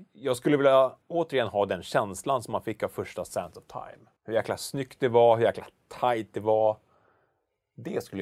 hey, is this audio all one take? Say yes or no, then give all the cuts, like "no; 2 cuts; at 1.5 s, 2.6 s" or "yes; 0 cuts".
no; 2 cuts; at 1.0 s, 4.2 s